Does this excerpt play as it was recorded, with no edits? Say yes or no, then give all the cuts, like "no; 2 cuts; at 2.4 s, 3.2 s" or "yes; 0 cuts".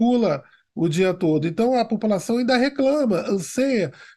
yes; 0 cuts